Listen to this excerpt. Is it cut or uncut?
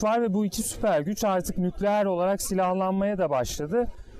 uncut